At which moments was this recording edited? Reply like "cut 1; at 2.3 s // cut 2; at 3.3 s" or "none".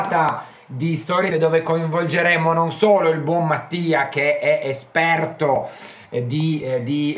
cut 1; at 1.3 s